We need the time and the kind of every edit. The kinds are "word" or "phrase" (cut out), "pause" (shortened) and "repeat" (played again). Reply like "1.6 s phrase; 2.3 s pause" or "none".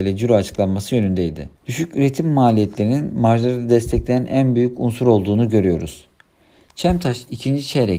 1.6 s pause